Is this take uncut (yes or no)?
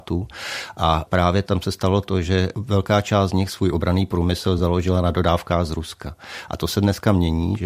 yes